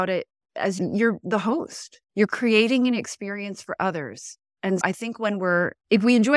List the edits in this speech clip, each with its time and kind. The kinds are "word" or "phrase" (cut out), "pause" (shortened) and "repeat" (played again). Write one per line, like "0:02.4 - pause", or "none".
0:02.0 - pause
0:04.8 - word